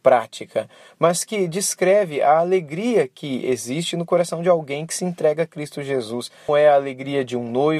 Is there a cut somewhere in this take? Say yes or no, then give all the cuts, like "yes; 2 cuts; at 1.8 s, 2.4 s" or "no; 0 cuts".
yes; 1 cut; at 6.5 s